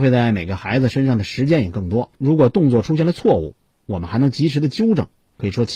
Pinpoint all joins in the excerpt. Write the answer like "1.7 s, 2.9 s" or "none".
2.1 s